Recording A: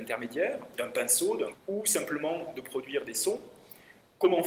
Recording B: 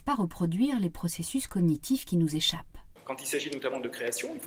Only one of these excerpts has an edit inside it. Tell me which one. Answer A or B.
A